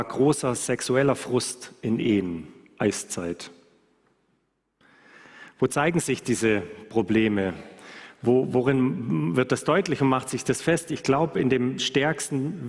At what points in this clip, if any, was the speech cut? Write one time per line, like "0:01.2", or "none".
none